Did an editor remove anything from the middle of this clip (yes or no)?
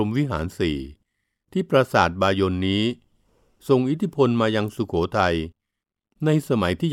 no